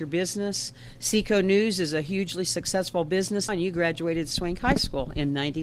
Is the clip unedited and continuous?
no; 1 cut; at 3.5 s

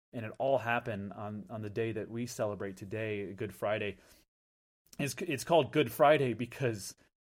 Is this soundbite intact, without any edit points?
yes; 0 cuts

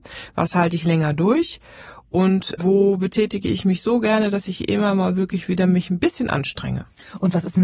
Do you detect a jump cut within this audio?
no; 0 cuts

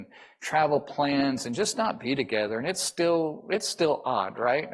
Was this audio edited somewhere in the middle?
no; 0 cuts

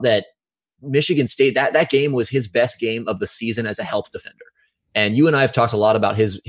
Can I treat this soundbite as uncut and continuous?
yes; 0 cuts

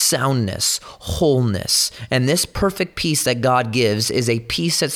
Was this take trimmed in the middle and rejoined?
no; 0 cuts

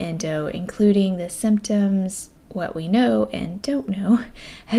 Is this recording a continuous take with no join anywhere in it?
no; 1 cut; at 2.4 s

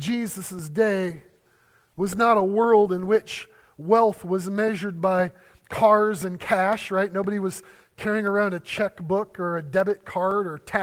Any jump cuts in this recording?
no; 0 cuts

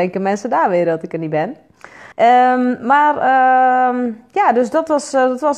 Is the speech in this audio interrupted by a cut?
yes; 1 cut; at 2.1 s

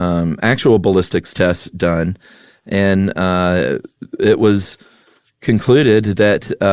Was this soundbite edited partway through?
no; 0 cuts

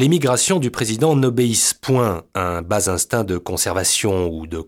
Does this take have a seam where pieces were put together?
no; 0 cuts

